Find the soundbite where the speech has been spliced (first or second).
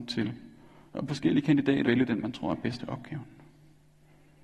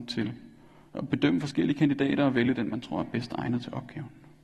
first